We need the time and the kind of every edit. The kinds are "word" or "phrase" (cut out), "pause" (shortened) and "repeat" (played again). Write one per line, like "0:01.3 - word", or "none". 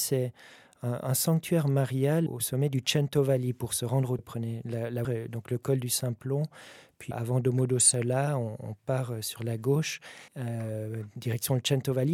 0:02.3 - word
0:04.2 - phrase
0:05.0 - word
0:07.1 - word
0:10.3 - pause